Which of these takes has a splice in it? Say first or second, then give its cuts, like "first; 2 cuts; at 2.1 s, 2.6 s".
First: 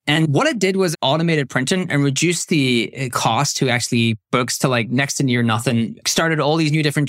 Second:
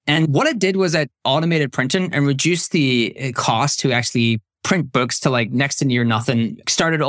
first; 2 cuts; at 0.9 s, 4.3 s